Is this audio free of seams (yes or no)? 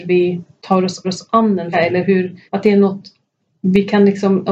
no